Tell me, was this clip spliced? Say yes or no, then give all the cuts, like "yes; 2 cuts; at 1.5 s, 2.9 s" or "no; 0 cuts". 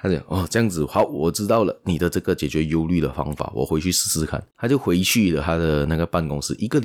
yes; 1 cut; at 4.5 s